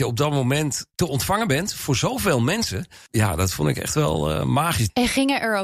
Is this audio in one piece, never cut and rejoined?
no; 1 cut; at 0.9 s

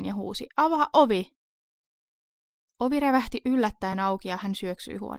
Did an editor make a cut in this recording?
no; 0 cuts

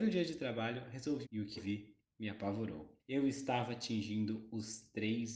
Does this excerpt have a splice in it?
yes; 3 cuts; at 1.2 s, 1.6 s, 3.0 s

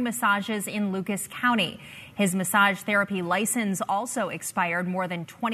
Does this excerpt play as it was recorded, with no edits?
yes; 0 cuts

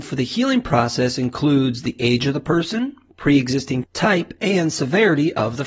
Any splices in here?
yes; 1 cut; at 3.8 s

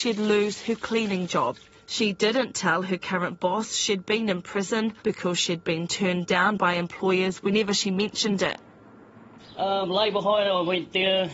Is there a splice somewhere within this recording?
yes; 2 cuts; at 1.7 s, 5.0 s

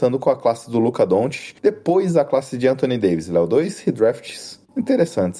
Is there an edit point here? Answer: yes; 1 cut; at 1.6 s

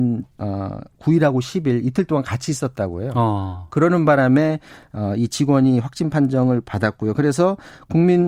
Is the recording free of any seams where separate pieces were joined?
yes; 0 cuts

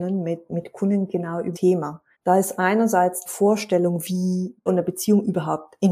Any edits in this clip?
yes; 4 cuts; at 1.5 s, 2.1 s, 3.3 s, 4.7 s

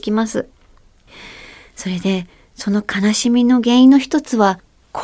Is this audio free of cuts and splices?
yes; 0 cuts

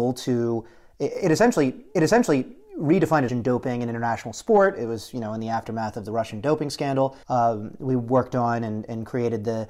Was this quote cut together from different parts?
yes; 3 cuts; at 2.0 s, 3.3 s, 7.2 s

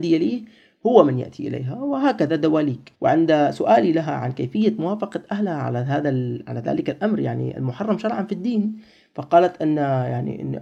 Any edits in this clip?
yes; 1 cut; at 2.9 s

